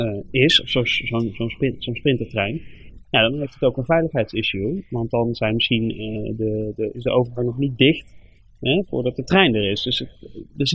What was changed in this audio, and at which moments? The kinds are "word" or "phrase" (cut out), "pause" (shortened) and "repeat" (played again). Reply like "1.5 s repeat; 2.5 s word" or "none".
none

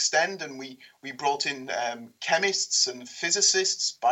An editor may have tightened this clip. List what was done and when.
none

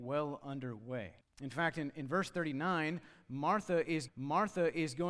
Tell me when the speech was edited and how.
1.2 s pause; 4.1 s repeat

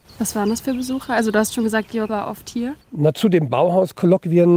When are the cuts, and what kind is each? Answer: 2.1 s word; 2.8 s pause

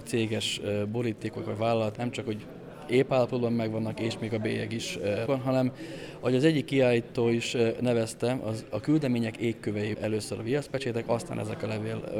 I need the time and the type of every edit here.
2.0 s word; 5.3 s word; 9.9 s word

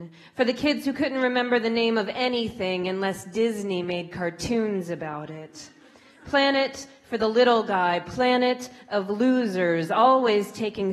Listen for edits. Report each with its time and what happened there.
none

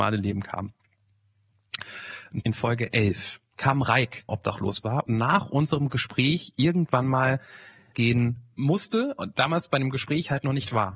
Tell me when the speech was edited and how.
2.4 s phrase; 4.3 s phrase; 5.1 s word; 7.9 s phrase

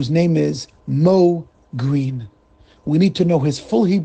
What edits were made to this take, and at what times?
none

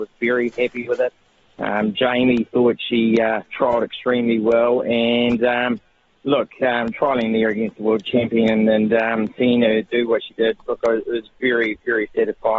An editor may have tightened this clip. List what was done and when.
3.5 s pause

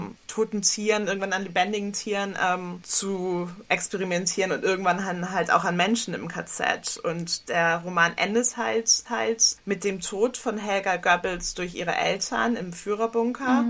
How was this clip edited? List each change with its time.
9.1 s repeat

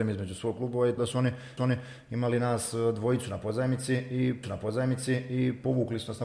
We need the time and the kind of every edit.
1.0 s word; 1.6 s repeat; 4.4 s repeat

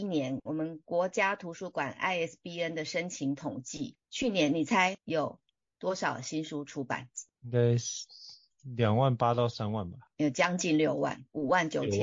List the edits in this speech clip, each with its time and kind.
none

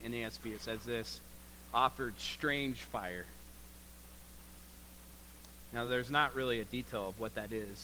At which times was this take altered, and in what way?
none

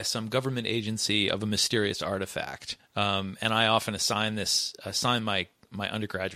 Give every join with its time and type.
2.8 s pause

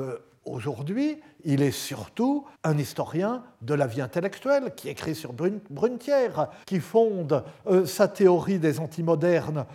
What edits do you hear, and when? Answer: 2.5 s pause; 6.6 s pause

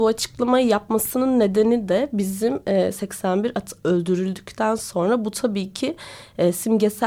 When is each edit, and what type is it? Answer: none

